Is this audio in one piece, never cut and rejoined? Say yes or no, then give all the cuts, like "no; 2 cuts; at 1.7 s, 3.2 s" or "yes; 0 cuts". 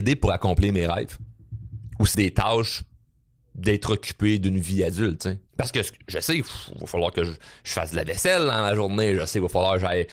no; 2 cuts; at 2.1 s, 5.5 s